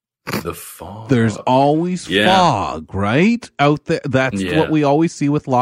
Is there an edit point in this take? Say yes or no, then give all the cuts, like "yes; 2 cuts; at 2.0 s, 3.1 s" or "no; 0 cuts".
no; 0 cuts